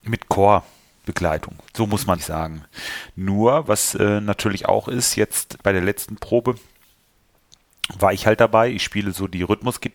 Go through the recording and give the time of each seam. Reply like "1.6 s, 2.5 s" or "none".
1.7 s, 2.2 s, 5.6 s